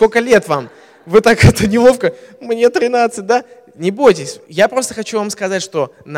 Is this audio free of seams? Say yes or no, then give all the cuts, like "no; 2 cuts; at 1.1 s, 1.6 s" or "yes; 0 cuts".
no; 1 cut; at 4.4 s